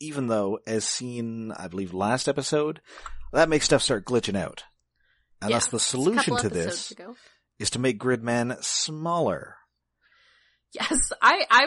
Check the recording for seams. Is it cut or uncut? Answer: uncut